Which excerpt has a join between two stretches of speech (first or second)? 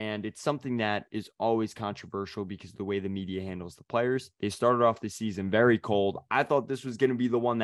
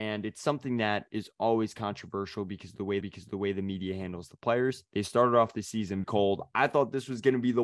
second